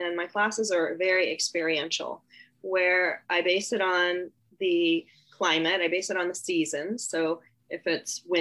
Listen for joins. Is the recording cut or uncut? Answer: uncut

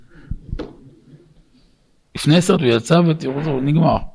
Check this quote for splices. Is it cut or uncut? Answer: cut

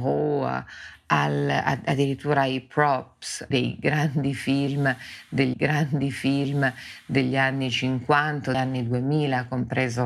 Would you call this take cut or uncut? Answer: cut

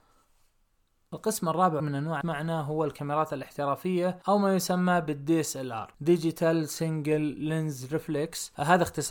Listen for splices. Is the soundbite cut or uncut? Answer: cut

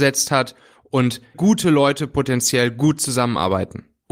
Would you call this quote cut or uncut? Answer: cut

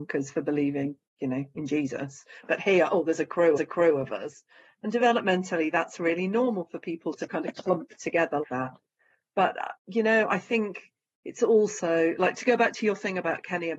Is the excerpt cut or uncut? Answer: cut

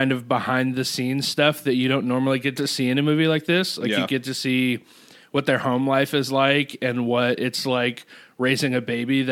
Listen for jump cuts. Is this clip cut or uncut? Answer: uncut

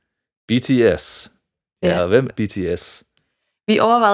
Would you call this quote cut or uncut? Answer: cut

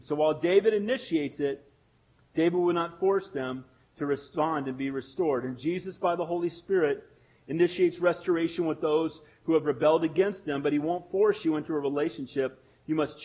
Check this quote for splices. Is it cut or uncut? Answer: uncut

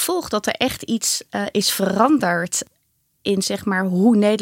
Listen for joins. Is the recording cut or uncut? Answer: uncut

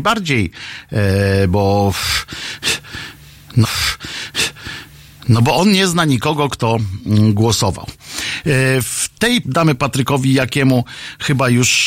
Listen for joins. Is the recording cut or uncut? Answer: cut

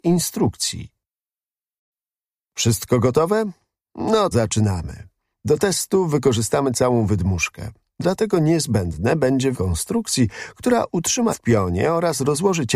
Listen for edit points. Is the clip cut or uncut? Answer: cut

